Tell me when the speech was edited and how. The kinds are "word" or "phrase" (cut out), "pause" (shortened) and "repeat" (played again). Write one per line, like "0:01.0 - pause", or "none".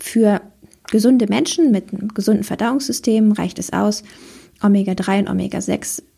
none